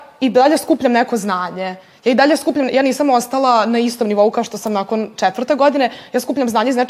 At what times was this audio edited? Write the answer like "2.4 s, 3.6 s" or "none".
none